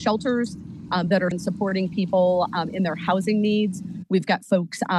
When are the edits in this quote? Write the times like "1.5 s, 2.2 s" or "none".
1.3 s